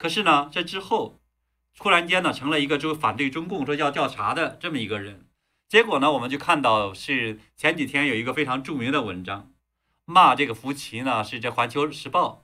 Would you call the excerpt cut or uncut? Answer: uncut